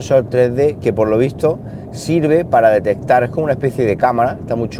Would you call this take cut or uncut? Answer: uncut